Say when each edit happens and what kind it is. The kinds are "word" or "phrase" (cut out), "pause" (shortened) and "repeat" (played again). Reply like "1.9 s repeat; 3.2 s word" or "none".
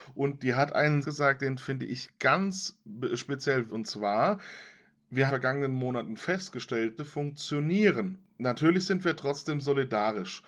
1.0 s word; 3.7 s word; 5.3 s phrase; 7.0 s phrase